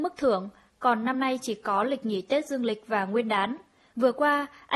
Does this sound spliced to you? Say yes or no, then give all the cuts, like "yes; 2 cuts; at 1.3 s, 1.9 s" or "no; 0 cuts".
no; 0 cuts